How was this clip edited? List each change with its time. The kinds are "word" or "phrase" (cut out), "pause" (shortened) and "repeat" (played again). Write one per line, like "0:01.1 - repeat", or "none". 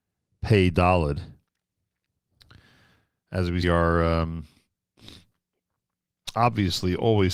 0:03.6 - phrase